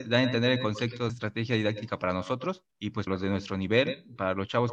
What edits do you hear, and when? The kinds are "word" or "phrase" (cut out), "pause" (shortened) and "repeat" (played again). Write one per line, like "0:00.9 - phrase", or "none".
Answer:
0:01.1 - phrase
0:02.7 - pause
0:03.1 - word